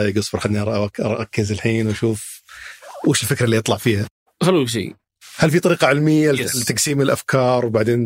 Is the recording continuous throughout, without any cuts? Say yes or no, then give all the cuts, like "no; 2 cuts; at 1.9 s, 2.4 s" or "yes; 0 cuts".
yes; 0 cuts